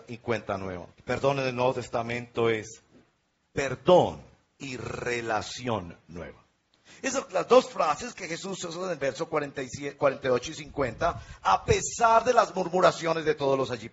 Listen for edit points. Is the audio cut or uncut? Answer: cut